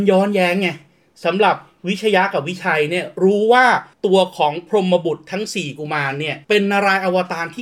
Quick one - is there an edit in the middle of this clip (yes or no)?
yes